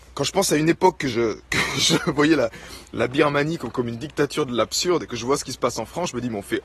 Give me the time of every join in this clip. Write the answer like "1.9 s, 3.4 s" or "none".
none